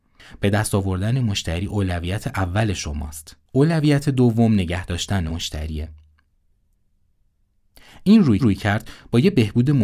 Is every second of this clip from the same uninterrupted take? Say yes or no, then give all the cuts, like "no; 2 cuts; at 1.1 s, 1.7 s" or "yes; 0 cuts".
no; 3 cuts; at 3.5 s, 5.3 s, 8.4 s